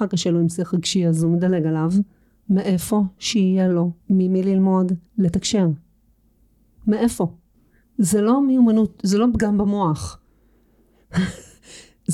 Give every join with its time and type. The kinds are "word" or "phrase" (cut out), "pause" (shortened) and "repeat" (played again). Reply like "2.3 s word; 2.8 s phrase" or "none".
2.2 s pause; 4.0 s pause; 5.1 s pause; 7.5 s pause